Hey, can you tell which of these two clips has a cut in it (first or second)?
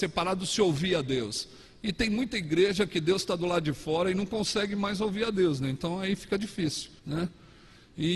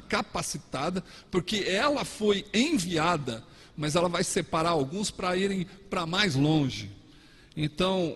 first